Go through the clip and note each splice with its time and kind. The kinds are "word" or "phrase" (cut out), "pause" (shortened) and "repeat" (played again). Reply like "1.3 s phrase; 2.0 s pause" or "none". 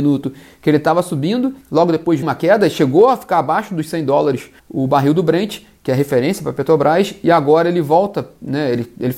1.6 s pause; 2.2 s word; 4.6 s pause